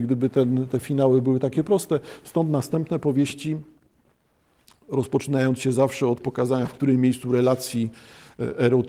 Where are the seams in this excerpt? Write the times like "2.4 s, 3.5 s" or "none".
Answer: none